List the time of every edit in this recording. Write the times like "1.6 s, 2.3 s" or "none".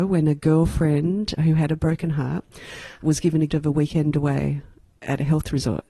1.4 s, 3.0 s, 3.5 s